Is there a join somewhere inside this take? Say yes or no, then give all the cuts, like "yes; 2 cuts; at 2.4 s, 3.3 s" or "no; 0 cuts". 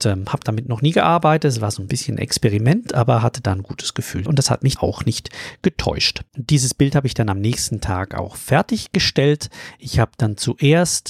yes; 3 cuts; at 4.3 s, 4.8 s, 6.3 s